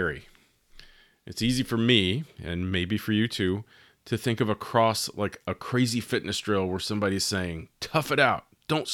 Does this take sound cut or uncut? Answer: uncut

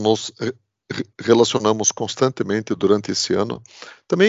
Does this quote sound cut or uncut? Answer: uncut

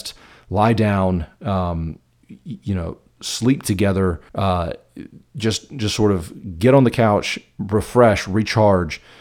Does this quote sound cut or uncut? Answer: cut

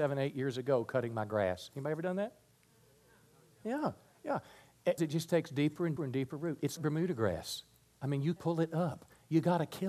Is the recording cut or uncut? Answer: cut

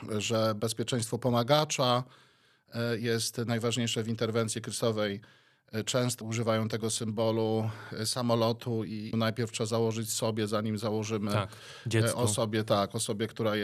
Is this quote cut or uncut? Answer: cut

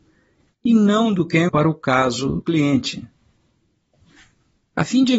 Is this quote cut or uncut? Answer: cut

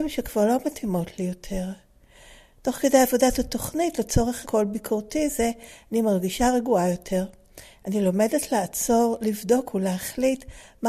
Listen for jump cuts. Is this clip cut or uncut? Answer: cut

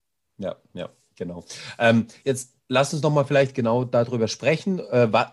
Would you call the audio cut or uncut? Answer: cut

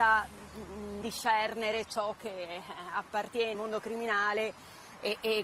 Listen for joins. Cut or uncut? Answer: cut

